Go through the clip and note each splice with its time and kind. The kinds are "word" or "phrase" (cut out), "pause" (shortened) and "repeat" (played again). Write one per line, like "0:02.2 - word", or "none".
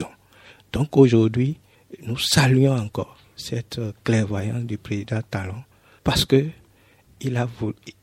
none